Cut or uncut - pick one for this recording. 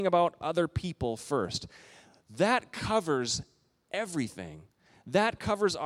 uncut